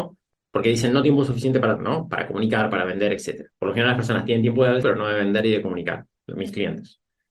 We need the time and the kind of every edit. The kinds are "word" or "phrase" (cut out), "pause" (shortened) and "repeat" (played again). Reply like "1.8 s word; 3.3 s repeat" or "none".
1.0 s word; 1.8 s word; 3.5 s pause; 4.8 s word